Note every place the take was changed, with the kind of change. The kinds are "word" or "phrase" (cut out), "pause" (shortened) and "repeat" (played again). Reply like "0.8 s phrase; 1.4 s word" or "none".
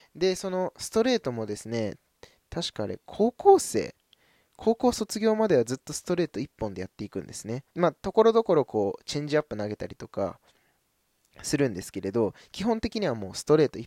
7.7 s pause